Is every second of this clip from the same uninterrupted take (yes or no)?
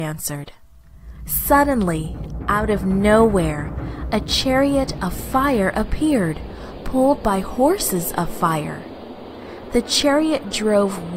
yes